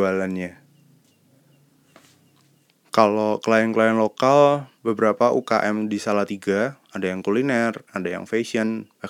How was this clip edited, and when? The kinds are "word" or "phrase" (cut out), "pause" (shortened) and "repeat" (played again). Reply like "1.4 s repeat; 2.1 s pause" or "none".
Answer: 4.7 s pause